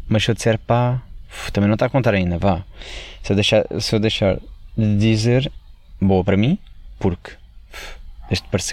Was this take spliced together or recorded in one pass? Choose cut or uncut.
uncut